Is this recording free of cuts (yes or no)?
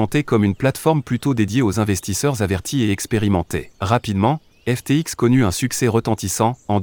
no